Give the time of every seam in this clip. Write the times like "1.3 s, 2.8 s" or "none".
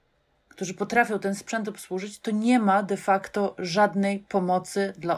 none